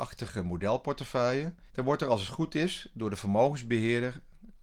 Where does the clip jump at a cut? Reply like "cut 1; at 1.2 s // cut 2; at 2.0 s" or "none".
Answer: cut 1; at 1.7 s

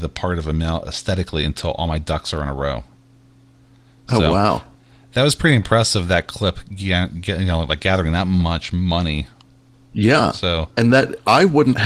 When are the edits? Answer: none

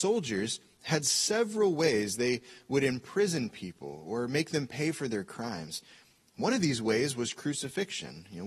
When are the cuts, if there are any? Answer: none

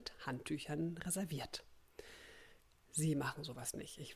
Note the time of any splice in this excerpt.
none

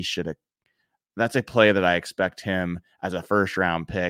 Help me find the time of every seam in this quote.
none

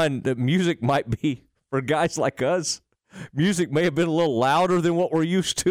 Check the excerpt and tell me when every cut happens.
none

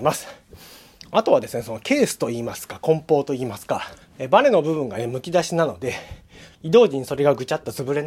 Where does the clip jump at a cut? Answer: cut 1; at 4.0 s // cut 2; at 6.5 s

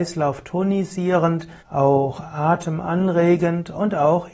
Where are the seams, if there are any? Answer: cut 1; at 1.6 s

